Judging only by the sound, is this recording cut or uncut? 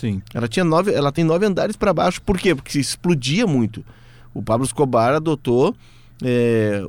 uncut